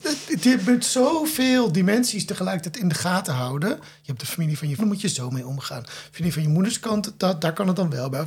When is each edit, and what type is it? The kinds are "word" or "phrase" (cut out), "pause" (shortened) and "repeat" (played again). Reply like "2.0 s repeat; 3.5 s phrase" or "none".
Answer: 4.2 s word; 4.8 s word

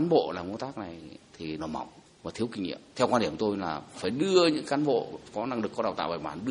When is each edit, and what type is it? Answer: 1.6 s word; 2.9 s pause; 3.9 s phrase; 5.3 s word

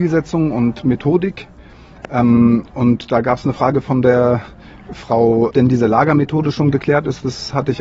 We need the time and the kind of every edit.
5.5 s phrase

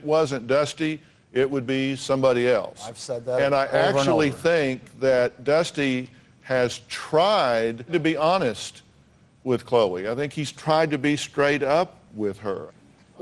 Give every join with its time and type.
none

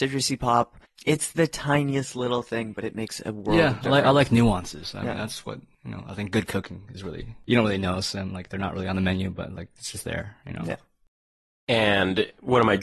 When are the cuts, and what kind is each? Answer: none

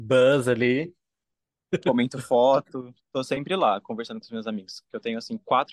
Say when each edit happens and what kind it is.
none

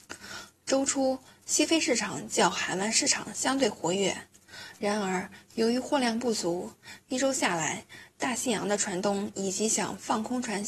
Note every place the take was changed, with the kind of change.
none

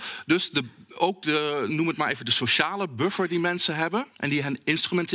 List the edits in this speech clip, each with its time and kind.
4.1 s pause

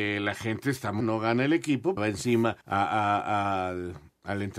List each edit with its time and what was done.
1.0 s word; 2.0 s phrase; 2.6 s pause

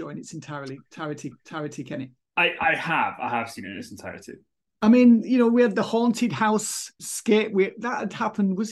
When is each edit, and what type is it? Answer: 1.3 s repeat; 7.0 s word

